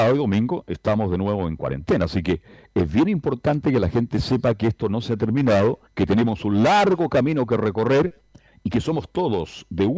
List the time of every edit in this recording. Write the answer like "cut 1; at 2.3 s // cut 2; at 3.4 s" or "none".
cut 1; at 5.9 s